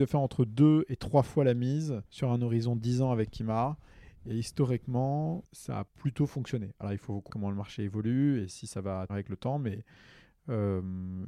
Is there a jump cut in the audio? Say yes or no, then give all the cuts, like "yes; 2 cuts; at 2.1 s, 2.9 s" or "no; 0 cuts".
yes; 5 cuts; at 2.1 s, 5.4 s, 5.9 s, 7.3 s, 9.1 s